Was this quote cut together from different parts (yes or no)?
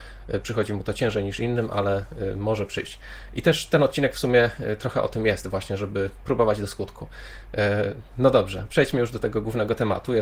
no